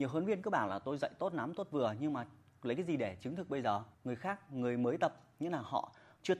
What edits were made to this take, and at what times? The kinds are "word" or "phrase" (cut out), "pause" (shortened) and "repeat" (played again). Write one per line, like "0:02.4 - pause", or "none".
0:03.9 - pause